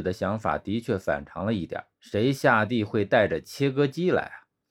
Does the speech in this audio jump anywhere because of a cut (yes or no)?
yes